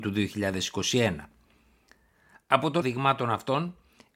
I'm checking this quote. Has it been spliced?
yes; 1 cut; at 2.8 s

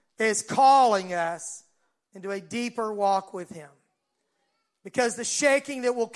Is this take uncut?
yes; 0 cuts

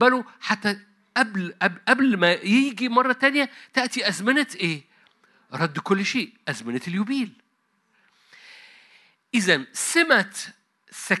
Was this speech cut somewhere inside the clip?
no; 0 cuts

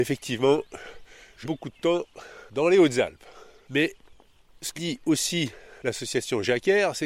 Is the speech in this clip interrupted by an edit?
yes; 2 cuts; at 1.4 s, 4.8 s

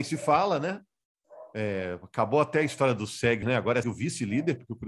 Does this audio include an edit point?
yes; 2 cuts; at 3.4 s, 3.8 s

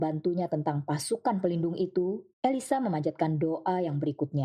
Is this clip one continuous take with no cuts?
no; 1 cut; at 2.3 s

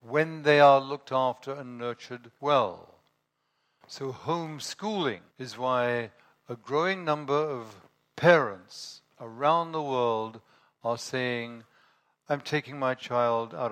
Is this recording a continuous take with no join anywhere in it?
no; 2 cuts; at 2.4 s, 5.3 s

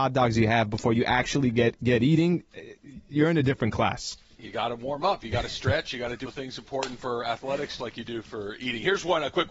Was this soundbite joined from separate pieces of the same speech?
yes; 2 cuts; at 6.2 s, 7.8 s

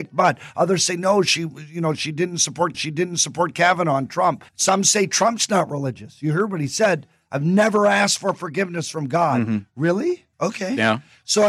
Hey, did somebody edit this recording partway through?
yes; 3 cuts; at 2.7 s, 4.5 s, 10.3 s

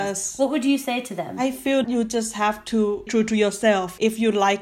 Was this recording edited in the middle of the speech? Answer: yes; 2 cuts; at 1.8 s, 3.1 s

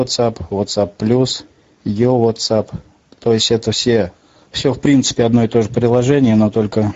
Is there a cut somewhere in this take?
no; 0 cuts

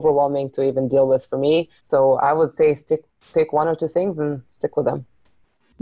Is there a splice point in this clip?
yes; 1 cut; at 1.8 s

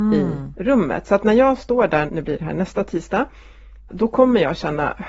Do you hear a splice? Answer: yes; 2 cuts; at 2.1 s, 3.9 s

